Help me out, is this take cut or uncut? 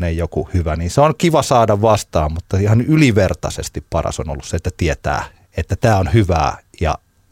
uncut